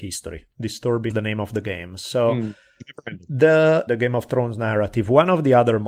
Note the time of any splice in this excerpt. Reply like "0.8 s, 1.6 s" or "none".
1.1 s, 3.9 s